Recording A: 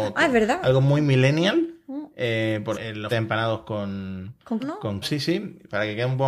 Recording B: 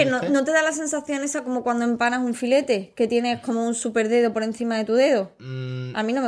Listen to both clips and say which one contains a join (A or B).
A